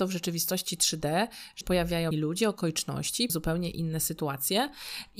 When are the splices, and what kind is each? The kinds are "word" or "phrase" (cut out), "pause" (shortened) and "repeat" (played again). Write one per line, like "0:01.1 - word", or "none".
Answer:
0:01.6 - word
0:02.1 - phrase
0:03.3 - word